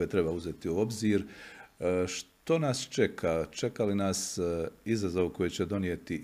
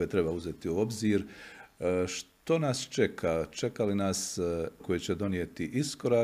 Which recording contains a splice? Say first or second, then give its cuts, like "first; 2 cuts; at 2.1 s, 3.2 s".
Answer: second; 1 cut; at 4.8 s